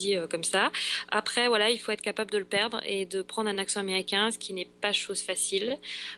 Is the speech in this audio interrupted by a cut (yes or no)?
no